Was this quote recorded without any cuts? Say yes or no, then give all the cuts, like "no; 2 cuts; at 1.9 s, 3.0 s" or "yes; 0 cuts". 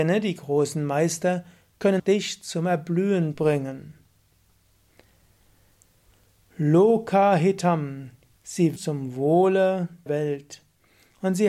no; 4 cuts; at 2.0 s, 3.3 s, 8.8 s, 10.1 s